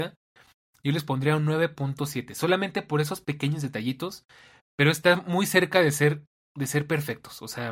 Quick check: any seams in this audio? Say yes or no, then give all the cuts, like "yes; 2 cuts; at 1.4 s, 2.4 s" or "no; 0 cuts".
no; 0 cuts